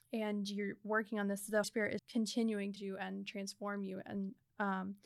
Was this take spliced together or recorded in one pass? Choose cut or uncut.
cut